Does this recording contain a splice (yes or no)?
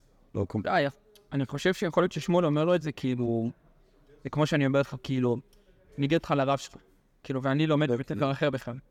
no